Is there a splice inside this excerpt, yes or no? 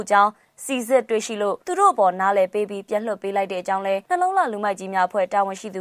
yes